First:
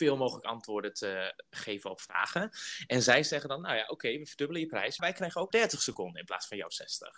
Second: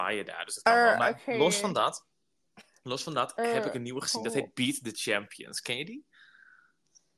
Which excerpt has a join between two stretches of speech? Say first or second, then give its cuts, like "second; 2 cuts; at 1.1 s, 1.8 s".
first; 2 cuts; at 5.0 s, 5.5 s